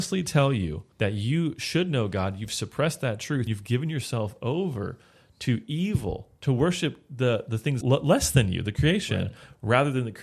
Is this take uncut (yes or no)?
no